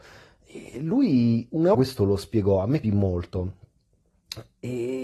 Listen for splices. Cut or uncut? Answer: cut